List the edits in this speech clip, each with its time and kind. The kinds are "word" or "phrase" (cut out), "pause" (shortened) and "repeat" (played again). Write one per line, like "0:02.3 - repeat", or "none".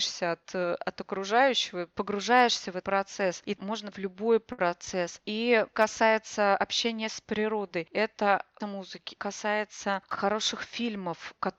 0:01.9 - word
0:02.8 - word
0:03.6 - word
0:03.9 - word
0:05.7 - word
0:08.6 - word
0:09.2 - word

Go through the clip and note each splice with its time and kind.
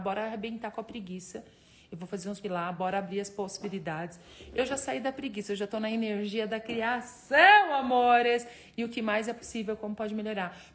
0:02.4 - word

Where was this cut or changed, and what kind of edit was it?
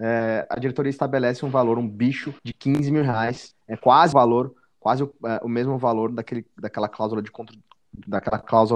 0:02.4 - pause
0:04.1 - word

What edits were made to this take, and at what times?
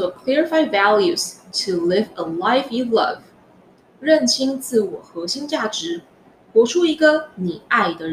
none

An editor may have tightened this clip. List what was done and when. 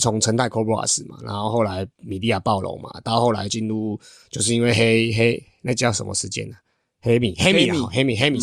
0:01.9 - pause

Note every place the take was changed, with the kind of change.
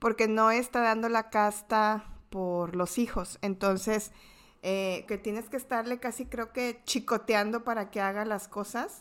0:05.1 - word

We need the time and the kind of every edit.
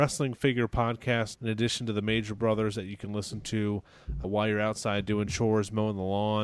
0:01.3 - word
0:04.2 - word

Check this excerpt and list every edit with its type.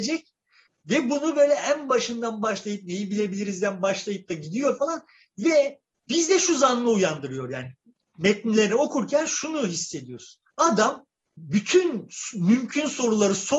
0:04.8 - word
0:10.5 - pause

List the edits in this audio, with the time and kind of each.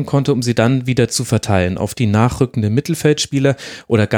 none

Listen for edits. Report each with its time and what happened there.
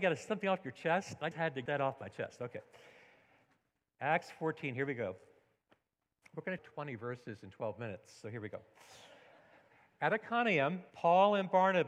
0:01.3 - word
0:01.7 - word
0:06.6 - phrase
0:10.9 - pause

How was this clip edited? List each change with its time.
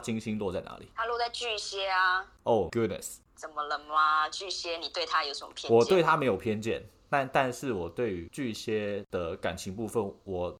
0:02.7 - word

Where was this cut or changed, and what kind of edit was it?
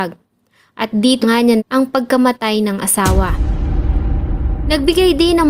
0:01.2 - word
0:01.6 - word

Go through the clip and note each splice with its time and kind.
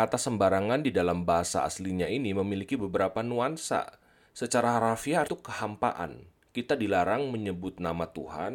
0:05.3 - phrase

